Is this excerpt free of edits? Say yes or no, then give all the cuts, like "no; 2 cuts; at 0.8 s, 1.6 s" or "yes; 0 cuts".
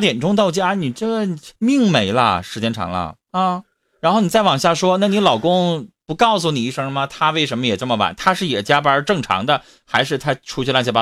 no; 2 cuts; at 1.6 s, 3.2 s